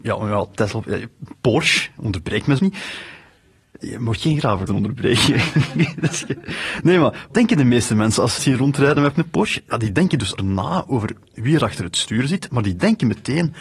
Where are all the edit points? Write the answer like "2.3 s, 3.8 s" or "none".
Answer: 2.6 s, 4.7 s, 7.3 s, 8.4 s, 9.1 s, 10.4 s